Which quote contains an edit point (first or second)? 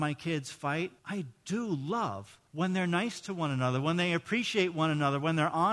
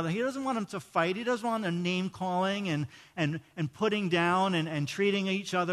first